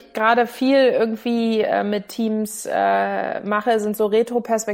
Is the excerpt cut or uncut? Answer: uncut